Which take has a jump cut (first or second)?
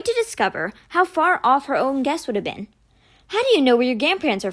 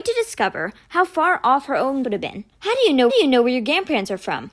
second